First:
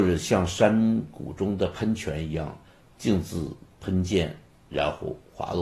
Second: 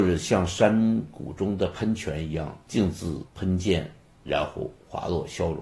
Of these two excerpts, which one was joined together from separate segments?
second; 2 cuts; at 2.6 s, 3.3 s

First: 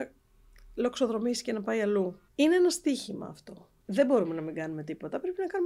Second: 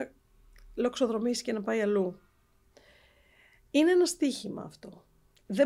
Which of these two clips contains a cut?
first; 2 cuts; at 2.3 s, 3.8 s

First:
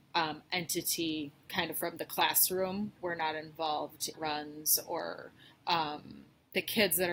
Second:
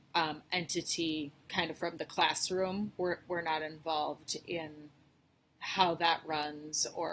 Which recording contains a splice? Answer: first; 2 cuts; at 3.0 s, 4.1 s

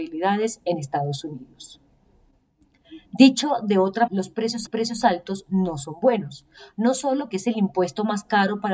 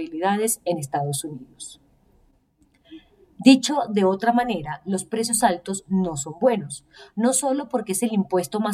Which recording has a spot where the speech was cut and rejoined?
first; 4 cuts; at 3.0 s, 4.1 s, 4.7 s, 7.3 s

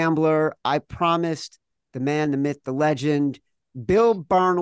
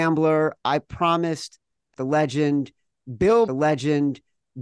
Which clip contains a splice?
second; 2 cuts; at 1.9 s, 3.5 s

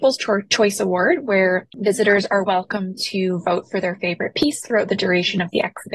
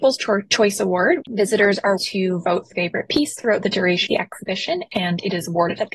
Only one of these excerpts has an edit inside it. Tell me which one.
second; 4 cuts; at 1.2 s, 2.0 s, 2.7 s, 4.1 s

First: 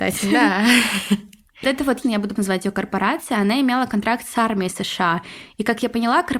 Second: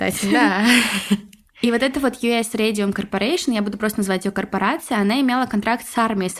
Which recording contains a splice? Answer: first; 3 cuts; at 1.6 s, 2.0 s, 2.4 s

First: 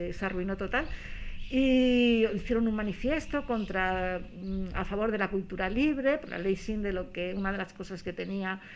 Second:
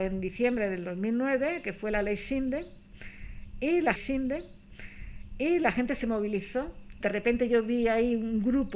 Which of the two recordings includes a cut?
second; 2 cuts; at 4.0 s, 7.0 s

